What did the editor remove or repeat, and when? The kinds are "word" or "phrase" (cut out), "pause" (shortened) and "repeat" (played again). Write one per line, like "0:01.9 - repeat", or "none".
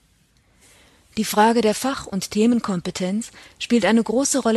none

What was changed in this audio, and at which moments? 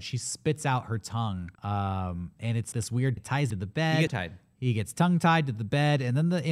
0:01.6 - pause
0:02.7 - word
0:03.2 - phrase
0:03.5 - phrase
0:04.1 - phrase

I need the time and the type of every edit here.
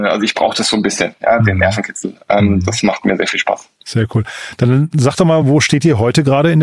none

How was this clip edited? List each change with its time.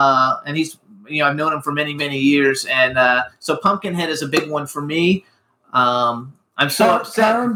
none

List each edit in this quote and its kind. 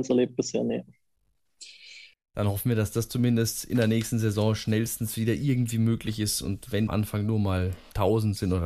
0:06.9 - phrase

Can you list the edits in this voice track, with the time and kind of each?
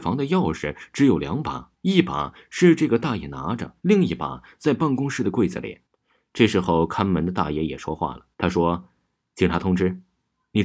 0:01.7 - pause
0:03.8 - pause
0:05.9 - pause
0:08.3 - pause

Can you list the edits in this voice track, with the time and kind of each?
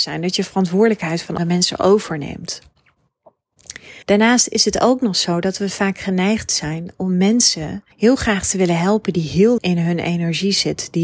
0:01.4 - word
0:04.0 - pause
0:06.9 - word
0:07.9 - pause
0:09.6 - word

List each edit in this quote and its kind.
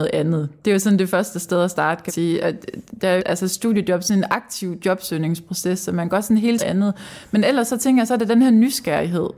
0:02.1 - word
0:03.2 - phrase
0:06.6 - phrase

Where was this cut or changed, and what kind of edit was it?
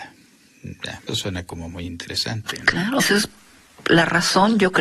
0:01.1 - word
0:03.0 - word

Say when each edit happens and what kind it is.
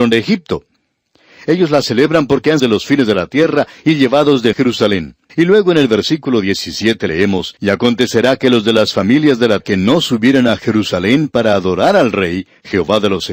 0:02.6 - phrase
0:04.5 - phrase
0:05.3 - pause
0:07.6 - pause
0:09.6 - word

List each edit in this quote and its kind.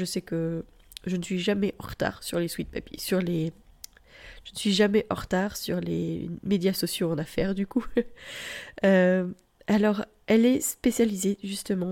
none

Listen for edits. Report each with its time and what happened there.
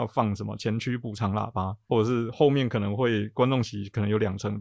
0:01.9 - word

